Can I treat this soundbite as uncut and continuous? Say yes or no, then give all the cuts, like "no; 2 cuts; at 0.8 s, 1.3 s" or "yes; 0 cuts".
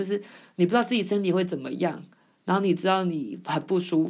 yes; 0 cuts